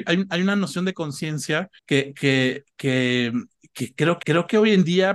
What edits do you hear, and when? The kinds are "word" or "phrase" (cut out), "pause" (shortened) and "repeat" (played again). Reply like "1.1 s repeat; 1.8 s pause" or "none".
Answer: 1.8 s pause; 4.2 s repeat